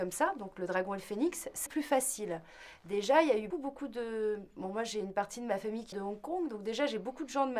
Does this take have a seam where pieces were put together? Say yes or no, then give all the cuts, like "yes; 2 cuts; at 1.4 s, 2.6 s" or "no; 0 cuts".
yes; 3 cuts; at 1.7 s, 3.5 s, 5.9 s